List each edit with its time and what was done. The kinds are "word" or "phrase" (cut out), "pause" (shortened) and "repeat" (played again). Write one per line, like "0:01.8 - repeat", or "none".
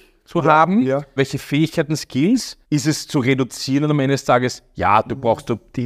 0:01.2 - word
0:02.6 - pause